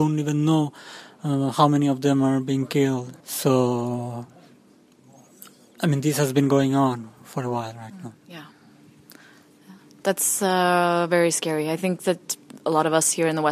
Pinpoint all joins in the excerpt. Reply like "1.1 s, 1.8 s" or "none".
3.2 s, 8.2 s